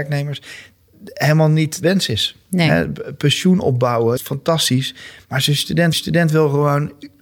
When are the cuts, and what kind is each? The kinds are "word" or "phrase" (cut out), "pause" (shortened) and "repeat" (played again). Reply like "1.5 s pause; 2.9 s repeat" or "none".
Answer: 1.8 s word; 4.2 s phrase; 5.9 s repeat